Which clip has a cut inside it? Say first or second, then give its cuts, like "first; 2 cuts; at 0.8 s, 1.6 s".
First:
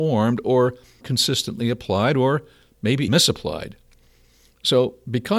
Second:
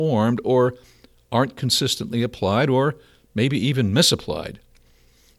first; 2 cuts; at 1.0 s, 3.1 s